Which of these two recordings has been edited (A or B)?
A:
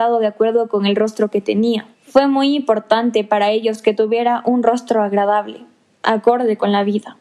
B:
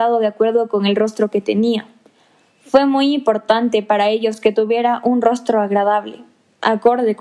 A